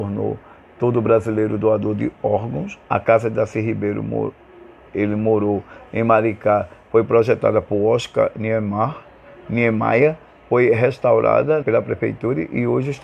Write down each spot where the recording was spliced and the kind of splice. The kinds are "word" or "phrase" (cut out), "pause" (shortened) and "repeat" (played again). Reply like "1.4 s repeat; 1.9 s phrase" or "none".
2.8 s pause; 4.9 s phrase; 11.6 s word